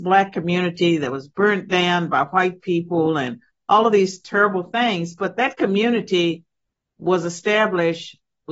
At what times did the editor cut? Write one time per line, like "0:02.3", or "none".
none